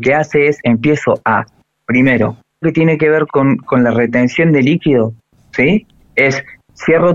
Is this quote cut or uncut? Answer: cut